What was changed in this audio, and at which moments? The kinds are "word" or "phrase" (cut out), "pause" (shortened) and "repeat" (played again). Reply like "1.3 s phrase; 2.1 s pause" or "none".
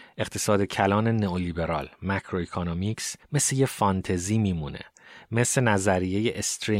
3.2 s pause